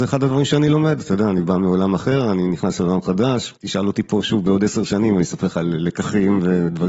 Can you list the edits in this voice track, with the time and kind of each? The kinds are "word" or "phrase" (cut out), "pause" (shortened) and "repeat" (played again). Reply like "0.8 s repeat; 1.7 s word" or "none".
3.6 s pause